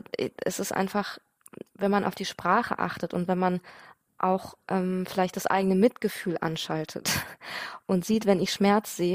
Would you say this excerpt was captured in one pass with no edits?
yes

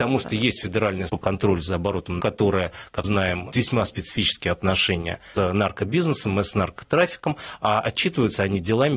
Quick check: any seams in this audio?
yes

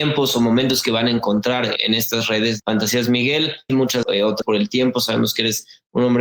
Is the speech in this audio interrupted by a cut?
yes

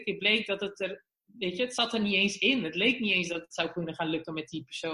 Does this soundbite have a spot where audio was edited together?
no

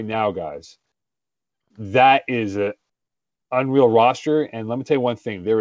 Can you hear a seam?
no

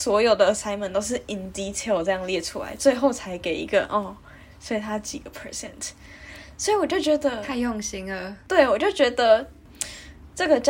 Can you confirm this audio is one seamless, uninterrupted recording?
yes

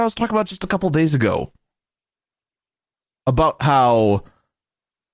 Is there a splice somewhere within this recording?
no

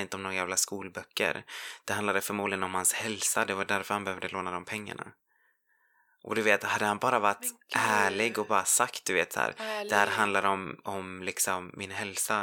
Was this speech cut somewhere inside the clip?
no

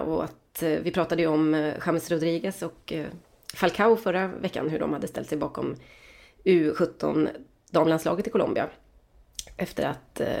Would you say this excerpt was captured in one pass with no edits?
yes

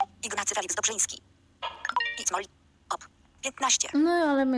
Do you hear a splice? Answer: yes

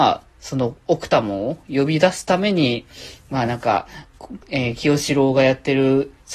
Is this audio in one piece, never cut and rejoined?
no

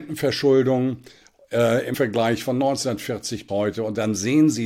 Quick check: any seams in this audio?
yes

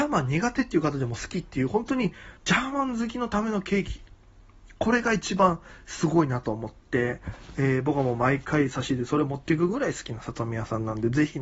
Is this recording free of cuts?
no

